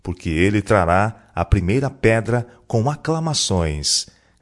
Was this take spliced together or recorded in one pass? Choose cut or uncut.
uncut